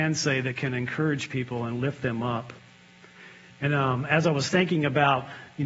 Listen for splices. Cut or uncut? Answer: uncut